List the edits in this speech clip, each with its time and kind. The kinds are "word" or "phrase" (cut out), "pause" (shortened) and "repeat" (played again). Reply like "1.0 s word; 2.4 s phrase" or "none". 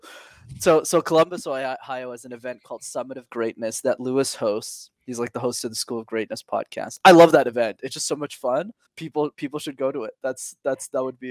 8.9 s pause